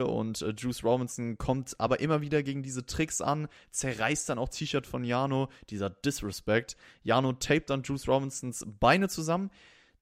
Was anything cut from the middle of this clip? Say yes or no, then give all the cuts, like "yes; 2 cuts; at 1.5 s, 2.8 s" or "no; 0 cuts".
yes; 1 cut; at 4.5 s